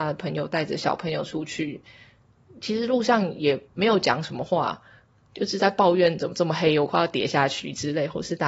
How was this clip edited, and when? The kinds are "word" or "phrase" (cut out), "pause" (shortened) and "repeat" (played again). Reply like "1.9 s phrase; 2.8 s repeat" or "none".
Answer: 3.7 s pause